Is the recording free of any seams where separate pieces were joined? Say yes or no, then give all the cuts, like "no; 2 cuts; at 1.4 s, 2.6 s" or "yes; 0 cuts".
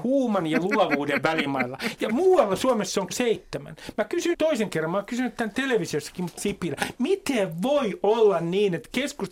no; 3 cuts; at 3.1 s, 4.3 s, 6.4 s